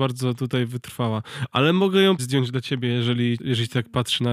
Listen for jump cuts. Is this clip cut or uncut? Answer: cut